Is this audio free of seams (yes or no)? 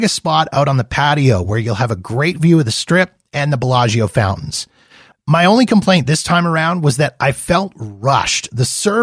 yes